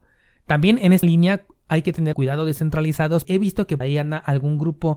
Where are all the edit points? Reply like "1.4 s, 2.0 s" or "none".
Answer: 1.0 s, 2.1 s, 3.2 s, 3.8 s